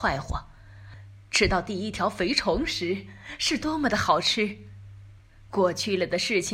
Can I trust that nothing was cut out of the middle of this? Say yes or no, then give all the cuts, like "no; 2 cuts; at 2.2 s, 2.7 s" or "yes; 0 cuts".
yes; 0 cuts